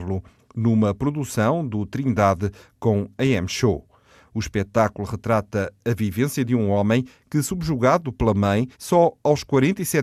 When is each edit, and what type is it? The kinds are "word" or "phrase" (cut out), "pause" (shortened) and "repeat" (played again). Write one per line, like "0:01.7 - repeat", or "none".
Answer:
0:08.7 - pause